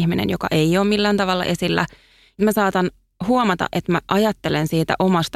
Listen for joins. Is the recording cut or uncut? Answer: cut